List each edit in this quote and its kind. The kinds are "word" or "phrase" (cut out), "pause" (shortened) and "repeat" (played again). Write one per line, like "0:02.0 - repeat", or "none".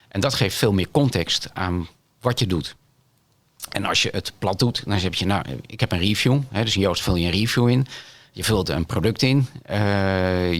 none

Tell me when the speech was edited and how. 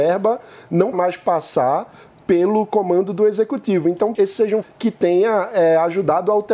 0:00.9 - word
0:04.1 - word
0:04.6 - word

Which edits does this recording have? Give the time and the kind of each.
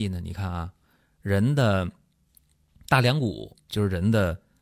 0:03.6 - pause

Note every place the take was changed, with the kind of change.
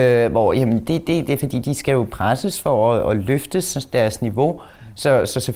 none

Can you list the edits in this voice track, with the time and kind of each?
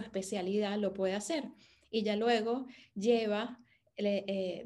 none

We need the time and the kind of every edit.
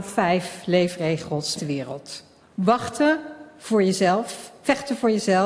0:01.6 - word
0:02.4 - pause

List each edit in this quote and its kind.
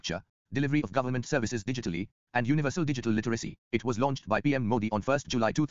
0:03.6 - pause

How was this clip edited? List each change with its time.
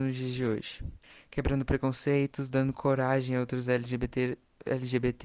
0:01.0 - pause

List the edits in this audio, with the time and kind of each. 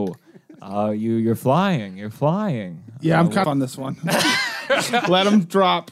0:03.4 - phrase

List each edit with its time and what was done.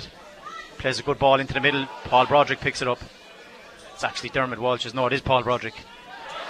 none

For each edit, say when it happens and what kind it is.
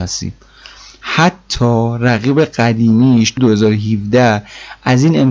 0:03.4 - word

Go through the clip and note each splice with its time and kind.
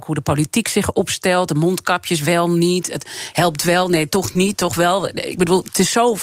none

